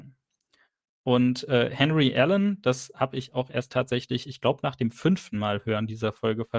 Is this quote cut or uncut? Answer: uncut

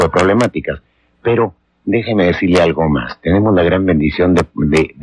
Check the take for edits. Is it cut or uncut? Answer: uncut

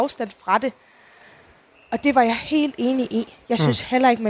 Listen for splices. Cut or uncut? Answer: uncut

